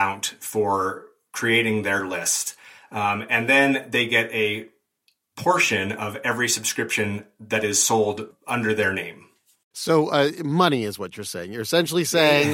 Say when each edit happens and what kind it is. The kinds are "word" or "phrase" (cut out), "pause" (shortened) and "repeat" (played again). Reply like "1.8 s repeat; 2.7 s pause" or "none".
none